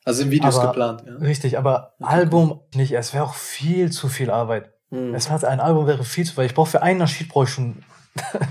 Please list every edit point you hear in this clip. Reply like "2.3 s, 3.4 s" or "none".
2.7 s, 5.3 s